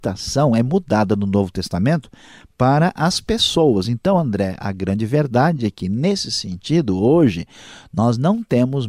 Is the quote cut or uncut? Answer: uncut